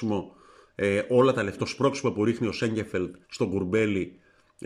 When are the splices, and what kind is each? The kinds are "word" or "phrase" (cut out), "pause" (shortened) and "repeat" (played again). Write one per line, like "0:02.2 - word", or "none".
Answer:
0:01.6 - word
0:03.2 - pause